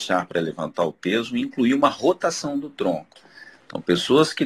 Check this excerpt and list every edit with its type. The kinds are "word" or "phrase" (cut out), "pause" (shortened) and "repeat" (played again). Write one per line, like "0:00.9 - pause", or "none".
none

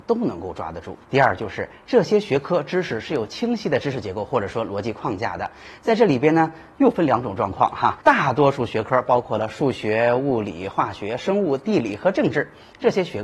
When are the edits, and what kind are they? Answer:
0:01.0 - pause
0:08.0 - pause

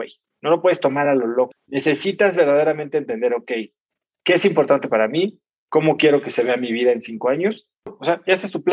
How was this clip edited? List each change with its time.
none

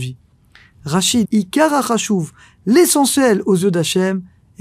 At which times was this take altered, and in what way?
0:01.2 - word

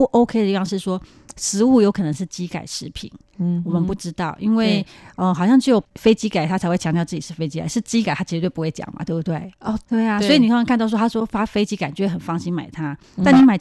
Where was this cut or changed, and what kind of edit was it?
none

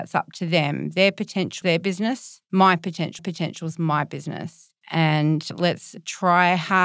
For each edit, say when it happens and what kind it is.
0:01.6 - word
0:03.2 - repeat

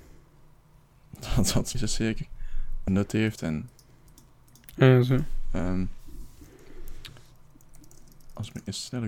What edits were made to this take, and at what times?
0:01.7 - word
0:02.9 - word

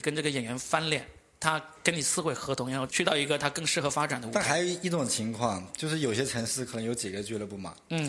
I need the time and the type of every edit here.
none

